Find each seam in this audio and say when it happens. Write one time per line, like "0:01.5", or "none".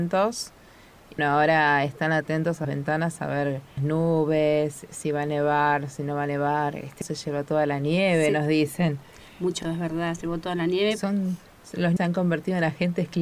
0:01.2
0:02.6
0:03.8
0:07.0
0:09.6
0:10.2
0:12.0